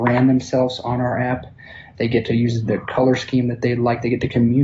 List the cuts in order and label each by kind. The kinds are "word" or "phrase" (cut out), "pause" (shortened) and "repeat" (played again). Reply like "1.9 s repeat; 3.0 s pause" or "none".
none